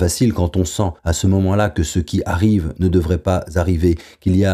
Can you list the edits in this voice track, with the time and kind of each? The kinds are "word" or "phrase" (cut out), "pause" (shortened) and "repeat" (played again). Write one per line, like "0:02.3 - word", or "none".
0:01.0 - pause